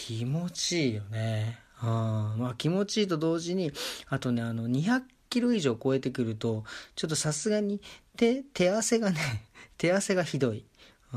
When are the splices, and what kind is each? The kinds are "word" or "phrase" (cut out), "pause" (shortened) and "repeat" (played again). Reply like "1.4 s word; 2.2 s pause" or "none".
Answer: none